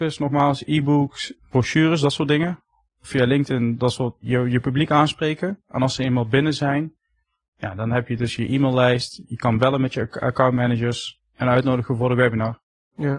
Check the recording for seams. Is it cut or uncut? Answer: uncut